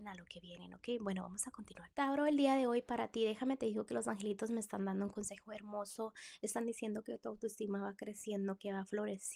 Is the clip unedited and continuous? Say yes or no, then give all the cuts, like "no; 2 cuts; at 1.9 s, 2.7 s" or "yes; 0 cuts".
no; 1 cut; at 1.9 s